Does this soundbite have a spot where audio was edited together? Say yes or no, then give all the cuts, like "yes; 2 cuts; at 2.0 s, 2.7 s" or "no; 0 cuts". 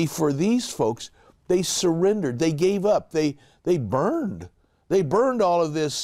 no; 0 cuts